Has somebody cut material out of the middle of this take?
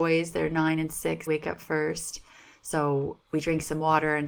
yes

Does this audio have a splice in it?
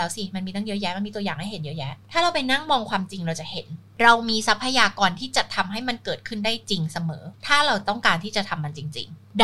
yes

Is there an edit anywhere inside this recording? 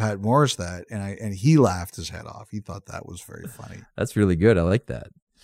no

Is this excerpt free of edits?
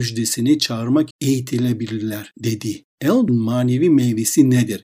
no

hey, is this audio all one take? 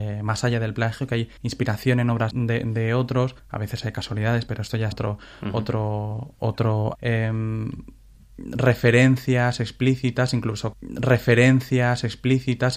no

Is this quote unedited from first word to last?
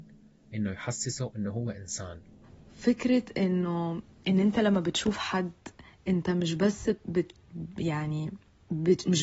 yes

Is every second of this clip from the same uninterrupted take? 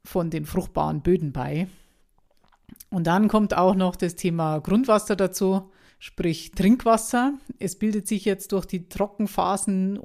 no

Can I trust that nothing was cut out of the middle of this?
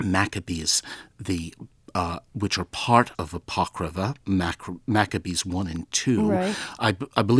no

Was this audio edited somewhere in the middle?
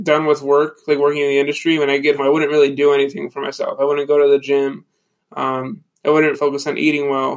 yes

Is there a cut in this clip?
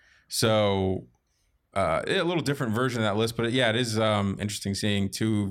no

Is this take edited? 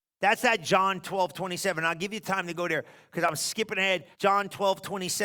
yes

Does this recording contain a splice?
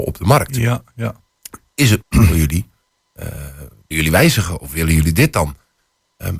yes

